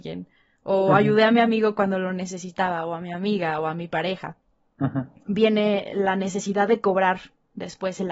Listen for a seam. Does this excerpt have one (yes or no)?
no